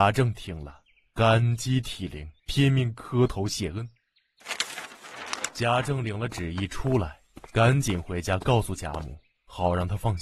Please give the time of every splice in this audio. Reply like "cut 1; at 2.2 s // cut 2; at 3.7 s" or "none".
cut 1; at 2.4 s